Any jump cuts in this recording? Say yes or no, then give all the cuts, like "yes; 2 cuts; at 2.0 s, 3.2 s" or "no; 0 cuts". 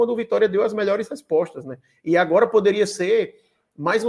no; 0 cuts